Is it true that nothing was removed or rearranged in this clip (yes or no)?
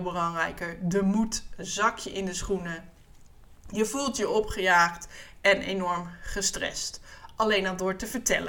yes